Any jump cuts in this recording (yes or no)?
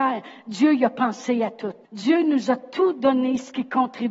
yes